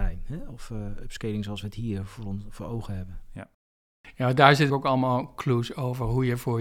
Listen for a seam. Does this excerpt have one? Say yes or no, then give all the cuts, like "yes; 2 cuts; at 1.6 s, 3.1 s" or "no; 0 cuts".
yes; 1 cut; at 4.7 s